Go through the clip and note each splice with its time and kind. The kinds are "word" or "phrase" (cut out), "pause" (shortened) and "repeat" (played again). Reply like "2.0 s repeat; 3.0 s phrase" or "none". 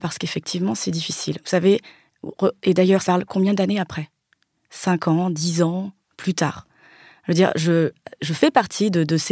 3.0 s phrase